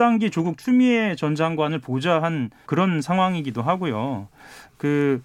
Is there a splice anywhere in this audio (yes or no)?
yes